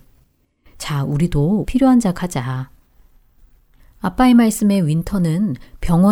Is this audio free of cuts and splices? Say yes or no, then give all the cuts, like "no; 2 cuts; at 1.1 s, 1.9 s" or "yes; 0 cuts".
no; 2 cuts; at 1.6 s, 2.2 s